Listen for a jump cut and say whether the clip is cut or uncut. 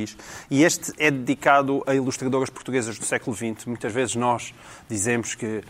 uncut